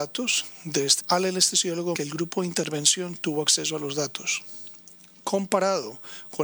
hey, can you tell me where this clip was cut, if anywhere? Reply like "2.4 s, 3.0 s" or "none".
1.0 s, 2.0 s